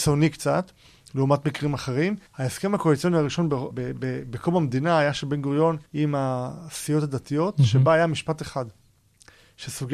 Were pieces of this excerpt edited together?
yes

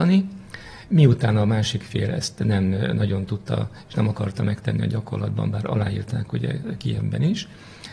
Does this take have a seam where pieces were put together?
no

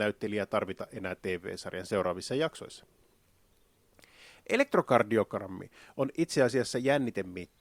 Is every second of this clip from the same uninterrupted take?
yes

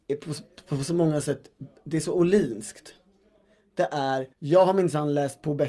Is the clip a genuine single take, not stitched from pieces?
no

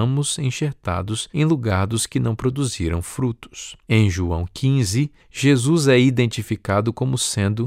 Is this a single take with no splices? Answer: no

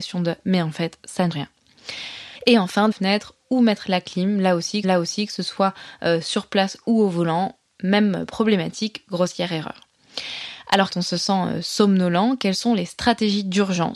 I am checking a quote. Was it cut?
yes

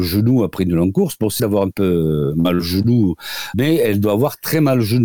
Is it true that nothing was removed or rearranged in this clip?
no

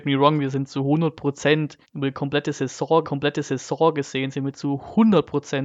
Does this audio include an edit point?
yes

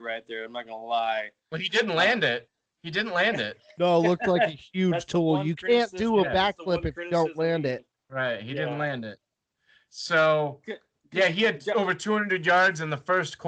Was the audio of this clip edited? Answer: no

